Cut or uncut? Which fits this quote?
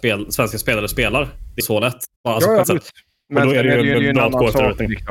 cut